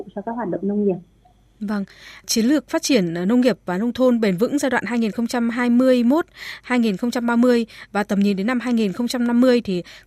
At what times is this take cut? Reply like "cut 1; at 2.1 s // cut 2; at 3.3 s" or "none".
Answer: none